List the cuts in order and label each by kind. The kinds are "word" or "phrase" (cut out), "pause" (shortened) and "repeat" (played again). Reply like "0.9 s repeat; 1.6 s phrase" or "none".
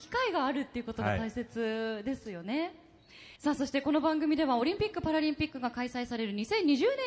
3.4 s pause

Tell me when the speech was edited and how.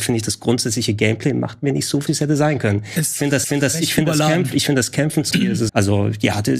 2.1 s word; 3.4 s repeat; 5.3 s word; 5.7 s word

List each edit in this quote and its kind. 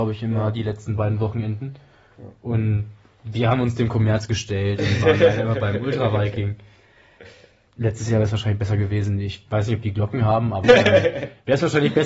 10.6 s word

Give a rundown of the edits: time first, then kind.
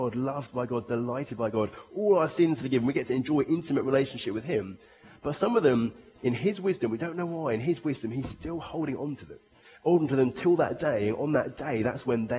none

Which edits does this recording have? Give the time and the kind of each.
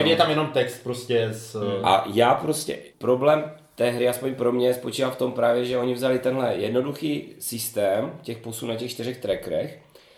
2.9 s pause

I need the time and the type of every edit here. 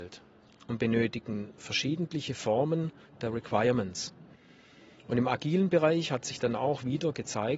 none

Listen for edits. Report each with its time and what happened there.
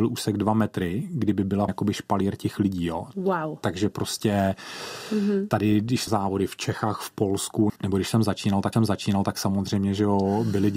1.7 s word; 6.1 s word; 7.8 s pause; 8.7 s repeat

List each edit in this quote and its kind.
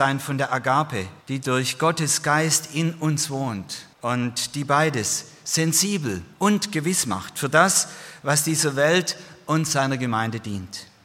1.2 s pause; 3.9 s pause; 6.3 s pause

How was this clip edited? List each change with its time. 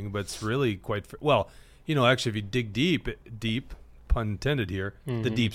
none

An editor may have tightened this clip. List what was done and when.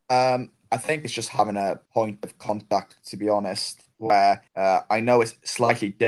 1.9 s pause; 4.5 s pause

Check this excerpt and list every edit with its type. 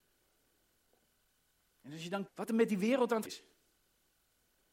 2.3 s word; 3.2 s word

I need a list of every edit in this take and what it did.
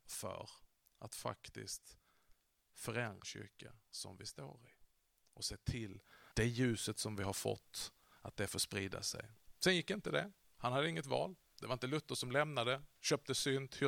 3.2 s word; 6.3 s word

